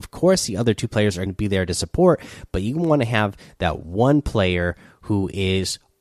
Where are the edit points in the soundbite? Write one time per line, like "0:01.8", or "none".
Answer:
0:01.3